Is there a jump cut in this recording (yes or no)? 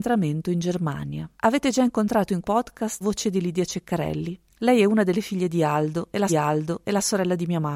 yes